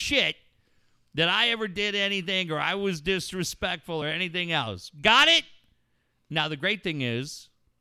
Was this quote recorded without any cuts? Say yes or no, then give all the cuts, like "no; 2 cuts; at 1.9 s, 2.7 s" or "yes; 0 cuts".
yes; 0 cuts